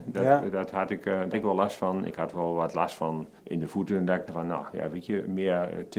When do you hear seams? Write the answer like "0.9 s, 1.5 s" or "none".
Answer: 1.3 s, 3.4 s, 4.3 s